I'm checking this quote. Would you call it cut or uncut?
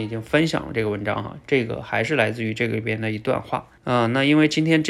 cut